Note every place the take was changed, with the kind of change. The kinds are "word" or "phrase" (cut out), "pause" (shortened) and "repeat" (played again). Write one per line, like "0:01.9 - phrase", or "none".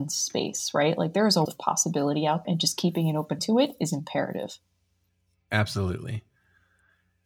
0:01.4 - word
0:02.4 - word
0:03.4 - word